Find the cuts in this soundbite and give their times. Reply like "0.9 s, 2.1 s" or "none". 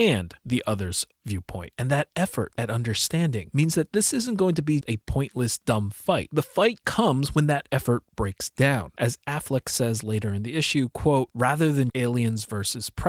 4.8 s, 11.9 s